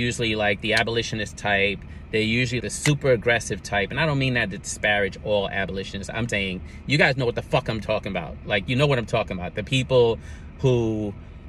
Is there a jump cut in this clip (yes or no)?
yes